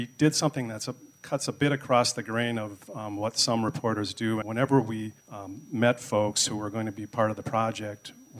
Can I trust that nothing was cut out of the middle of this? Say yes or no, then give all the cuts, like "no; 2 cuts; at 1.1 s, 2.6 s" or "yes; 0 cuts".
no; 2 cuts; at 4.4 s, 5.2 s